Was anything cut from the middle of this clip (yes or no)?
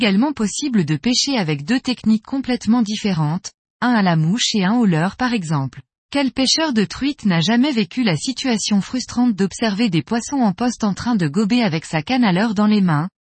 yes